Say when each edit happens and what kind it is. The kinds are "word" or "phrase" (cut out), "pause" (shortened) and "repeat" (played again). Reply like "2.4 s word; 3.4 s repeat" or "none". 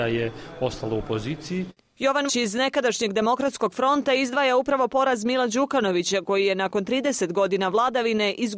2.3 s word